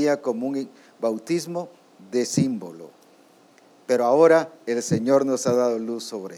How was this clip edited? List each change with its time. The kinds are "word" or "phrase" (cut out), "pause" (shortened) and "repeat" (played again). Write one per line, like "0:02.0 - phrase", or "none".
none

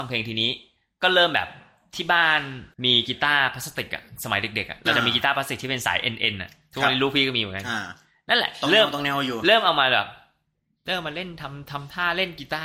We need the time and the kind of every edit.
0:02.7 - pause

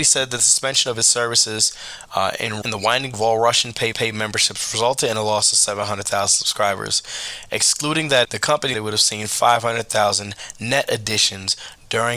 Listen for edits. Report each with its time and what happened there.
0:02.6 - word
0:03.1 - word
0:03.9 - repeat
0:08.2 - word
0:08.7 - word

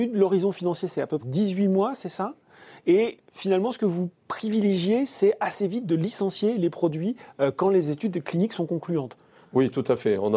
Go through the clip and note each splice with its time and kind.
0:01.2 - word
0:03.2 - word

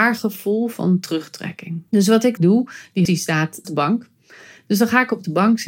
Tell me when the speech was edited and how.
0:01.9 - pause
0:02.4 - phrase
0:03.0 - word
0:03.6 - word

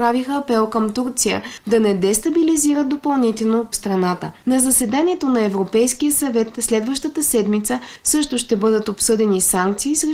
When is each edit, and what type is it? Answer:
0:03.7 - word

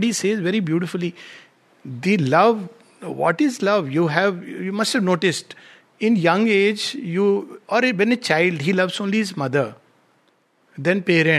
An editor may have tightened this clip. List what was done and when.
none

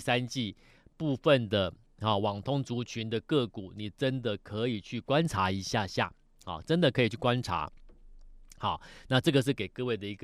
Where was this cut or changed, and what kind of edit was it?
none

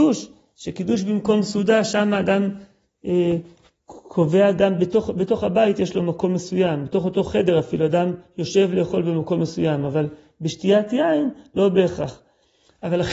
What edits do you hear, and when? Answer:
none

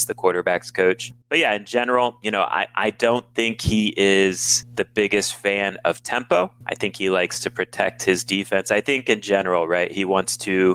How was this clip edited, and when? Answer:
none

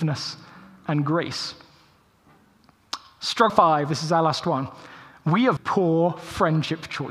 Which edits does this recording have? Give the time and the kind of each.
0:03.5 - word
0:05.6 - word

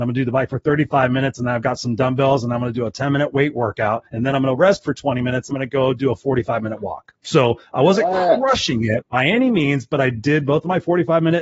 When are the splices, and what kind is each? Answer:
0:04.1 - pause
0:05.5 - word
0:07.2 - pause

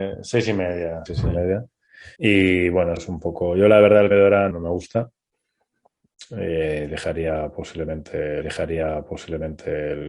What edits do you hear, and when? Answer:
0:01.1 - word
0:02.2 - pause
0:03.0 - phrase
0:04.1 - word
0:04.5 - word
0:08.4 - repeat

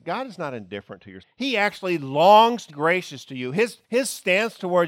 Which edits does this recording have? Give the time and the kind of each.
0:01.2 - word
0:02.7 - word
0:03.8 - pause

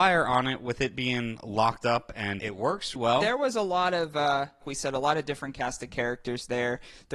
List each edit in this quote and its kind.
0:02.4 - word
0:03.0 - word
0:04.6 - word

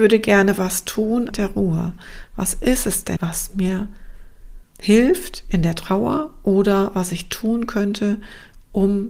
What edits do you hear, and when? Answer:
0:01.3 - phrase
0:03.2 - word
0:04.7 - pause

